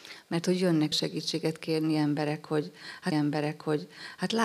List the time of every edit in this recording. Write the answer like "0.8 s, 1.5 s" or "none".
0.9 s, 3.1 s